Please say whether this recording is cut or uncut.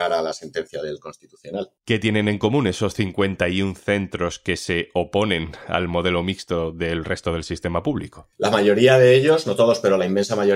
cut